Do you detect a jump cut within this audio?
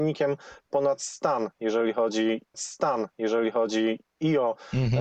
yes; 1 cut; at 2.5 s

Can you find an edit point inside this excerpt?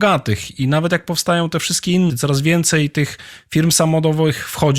yes; 1 cut; at 2.1 s

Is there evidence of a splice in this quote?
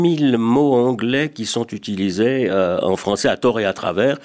no; 0 cuts

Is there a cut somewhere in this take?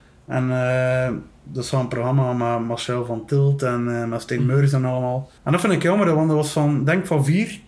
yes; 1 cut; at 5.4 s

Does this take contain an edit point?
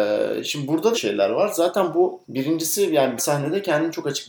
yes; 3 cuts; at 0.9 s, 2.2 s, 3.2 s

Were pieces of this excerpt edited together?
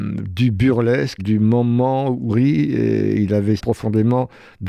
yes; 3 cuts; at 1.2 s, 2.3 s, 3.6 s

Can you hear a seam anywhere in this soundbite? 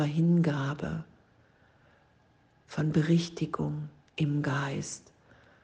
no; 0 cuts

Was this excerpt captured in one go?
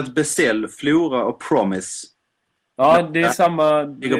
yes; 0 cuts

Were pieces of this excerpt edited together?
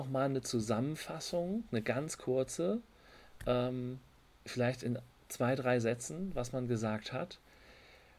no; 0 cuts

